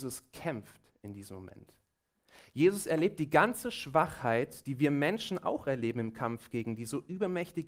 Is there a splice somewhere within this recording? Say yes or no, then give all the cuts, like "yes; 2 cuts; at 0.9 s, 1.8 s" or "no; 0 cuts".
no; 0 cuts